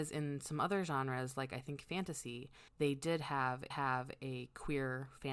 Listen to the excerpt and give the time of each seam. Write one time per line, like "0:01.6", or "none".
0:02.7
0:03.7